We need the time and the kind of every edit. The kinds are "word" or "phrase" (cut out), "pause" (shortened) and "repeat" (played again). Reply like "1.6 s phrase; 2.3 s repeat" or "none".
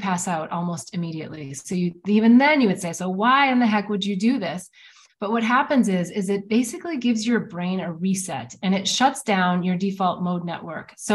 none

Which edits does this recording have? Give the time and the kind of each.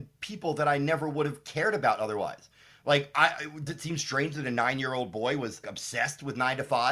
3.7 s word; 5.6 s word

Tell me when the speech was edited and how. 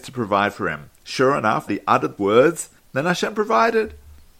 0.9 s pause; 1.7 s phrase; 2.2 s word; 2.8 s pause

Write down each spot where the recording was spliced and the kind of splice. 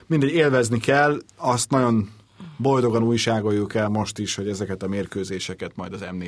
1.3 s pause

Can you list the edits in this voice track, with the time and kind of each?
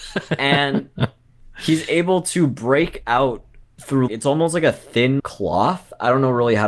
4.1 s word; 5.2 s word

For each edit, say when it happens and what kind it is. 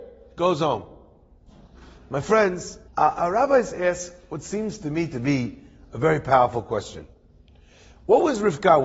2.9 s pause

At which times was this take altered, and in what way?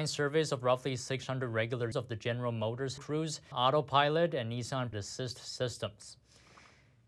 1.9 s word; 3.0 s word; 3.5 s word; 4.9 s word

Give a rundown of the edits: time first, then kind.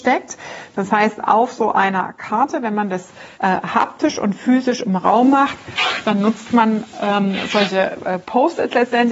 3.3 s pause

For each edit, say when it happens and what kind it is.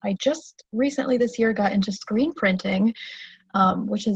none

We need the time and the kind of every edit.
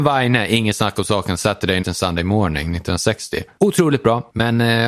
1.8 s word

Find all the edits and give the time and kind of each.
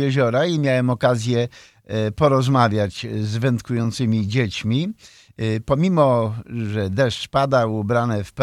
none

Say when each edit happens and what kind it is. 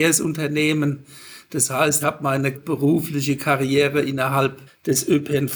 2.0 s word; 2.5 s word; 4.7 s pause

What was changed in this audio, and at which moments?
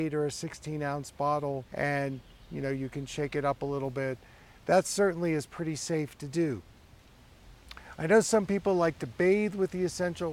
1.7 s pause

